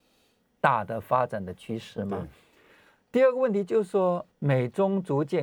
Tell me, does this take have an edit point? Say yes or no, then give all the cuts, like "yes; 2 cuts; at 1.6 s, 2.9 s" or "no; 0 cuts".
yes; 1 cut; at 4.3 s